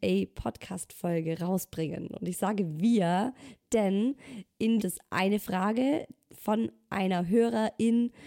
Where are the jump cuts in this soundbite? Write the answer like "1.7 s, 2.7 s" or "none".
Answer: 4.8 s